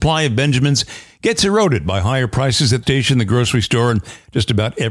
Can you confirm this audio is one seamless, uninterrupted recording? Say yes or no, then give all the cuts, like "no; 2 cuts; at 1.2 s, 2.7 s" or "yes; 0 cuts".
no; 1 cut; at 2.8 s